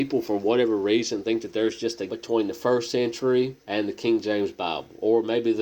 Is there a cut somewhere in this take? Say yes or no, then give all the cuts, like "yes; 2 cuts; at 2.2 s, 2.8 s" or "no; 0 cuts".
yes; 2 cuts; at 2.1 s, 3.6 s